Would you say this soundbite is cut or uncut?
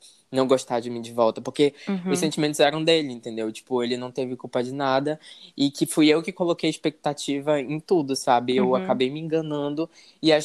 uncut